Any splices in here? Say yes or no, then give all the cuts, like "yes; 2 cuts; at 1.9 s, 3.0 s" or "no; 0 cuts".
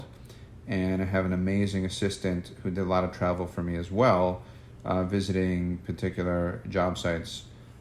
no; 0 cuts